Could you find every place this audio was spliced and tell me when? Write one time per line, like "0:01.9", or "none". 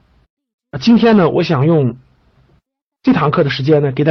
none